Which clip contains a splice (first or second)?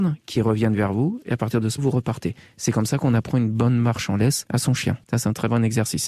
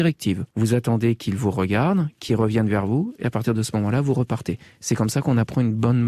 first